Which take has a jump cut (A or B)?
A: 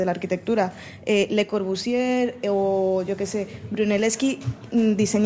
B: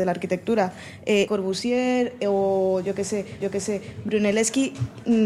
B